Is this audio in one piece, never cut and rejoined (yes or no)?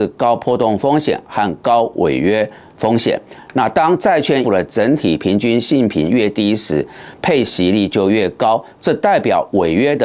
no